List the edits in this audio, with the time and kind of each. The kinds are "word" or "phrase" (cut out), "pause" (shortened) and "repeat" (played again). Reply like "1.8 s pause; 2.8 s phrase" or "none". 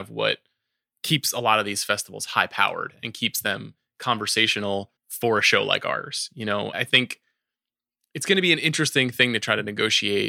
5.0 s pause; 6.7 s word